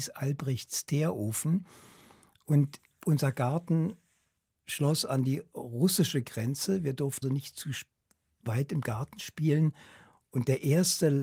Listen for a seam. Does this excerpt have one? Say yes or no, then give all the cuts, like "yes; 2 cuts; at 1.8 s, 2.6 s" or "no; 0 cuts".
yes; 1 cut; at 7.2 s